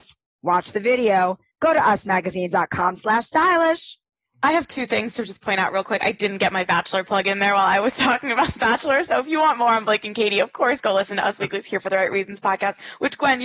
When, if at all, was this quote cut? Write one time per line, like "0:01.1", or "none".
none